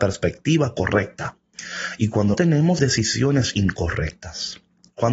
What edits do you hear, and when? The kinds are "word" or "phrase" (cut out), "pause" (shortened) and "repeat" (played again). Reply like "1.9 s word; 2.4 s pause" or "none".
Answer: 2.3 s word; 2.8 s phrase